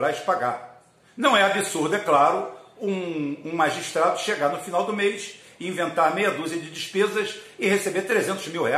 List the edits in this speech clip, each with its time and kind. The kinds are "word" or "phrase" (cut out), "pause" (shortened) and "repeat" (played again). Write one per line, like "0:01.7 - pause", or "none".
none